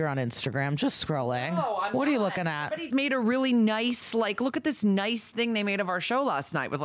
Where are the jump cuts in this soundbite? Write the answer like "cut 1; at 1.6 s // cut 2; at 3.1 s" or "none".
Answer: cut 1; at 2.9 s